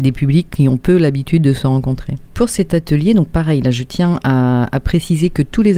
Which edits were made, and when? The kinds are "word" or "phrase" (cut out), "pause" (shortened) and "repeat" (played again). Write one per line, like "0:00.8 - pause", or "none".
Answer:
none